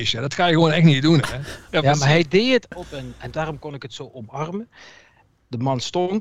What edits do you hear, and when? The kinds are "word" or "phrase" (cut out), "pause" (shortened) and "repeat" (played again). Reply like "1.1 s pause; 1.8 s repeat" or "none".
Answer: none